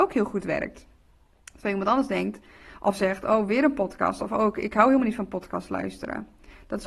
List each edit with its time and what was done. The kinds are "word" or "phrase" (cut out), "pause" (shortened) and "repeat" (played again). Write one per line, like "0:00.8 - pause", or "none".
none